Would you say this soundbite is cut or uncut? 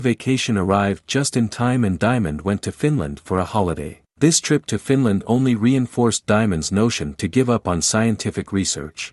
cut